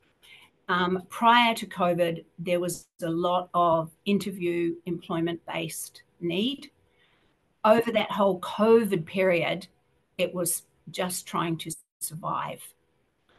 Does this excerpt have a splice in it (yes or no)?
no